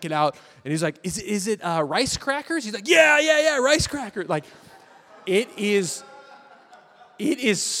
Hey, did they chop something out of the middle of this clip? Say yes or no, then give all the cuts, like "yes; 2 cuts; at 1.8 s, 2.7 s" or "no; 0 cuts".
no; 0 cuts